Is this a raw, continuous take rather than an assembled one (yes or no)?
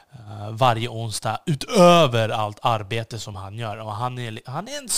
yes